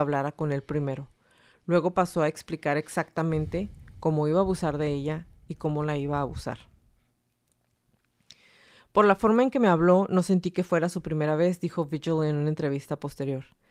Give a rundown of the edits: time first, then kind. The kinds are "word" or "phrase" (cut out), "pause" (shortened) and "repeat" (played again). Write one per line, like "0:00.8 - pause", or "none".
none